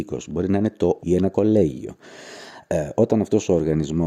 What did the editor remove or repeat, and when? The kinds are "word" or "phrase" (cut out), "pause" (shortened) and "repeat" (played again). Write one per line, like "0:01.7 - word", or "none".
0:01.0 - word